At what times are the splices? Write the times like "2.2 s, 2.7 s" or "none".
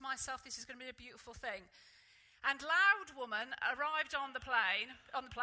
none